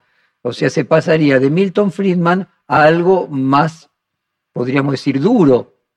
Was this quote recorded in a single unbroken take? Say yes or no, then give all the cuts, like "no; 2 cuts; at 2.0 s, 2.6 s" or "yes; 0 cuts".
yes; 0 cuts